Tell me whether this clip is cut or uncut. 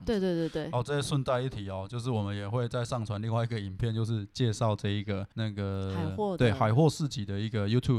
cut